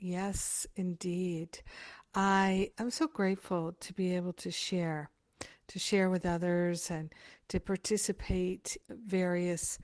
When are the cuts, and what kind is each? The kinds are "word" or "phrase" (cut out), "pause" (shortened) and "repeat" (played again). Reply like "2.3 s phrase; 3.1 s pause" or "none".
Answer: 2.7 s word; 8.8 s word

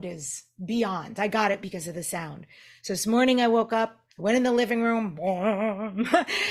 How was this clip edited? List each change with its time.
4.1 s pause

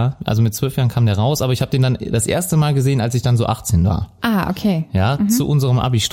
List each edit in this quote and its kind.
none

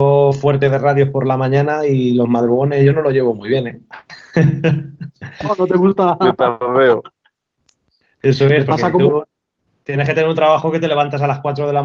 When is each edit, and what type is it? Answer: none

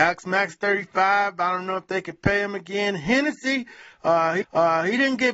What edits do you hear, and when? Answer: 4.4 s repeat

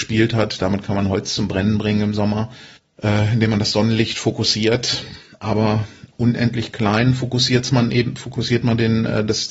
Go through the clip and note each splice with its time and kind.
2.8 s pause

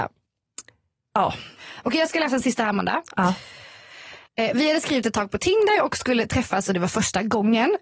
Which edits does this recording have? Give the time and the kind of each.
none

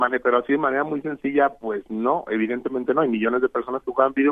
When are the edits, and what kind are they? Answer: none

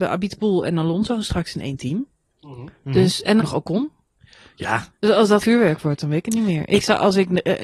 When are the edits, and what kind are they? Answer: 3.4 s word; 5.4 s word

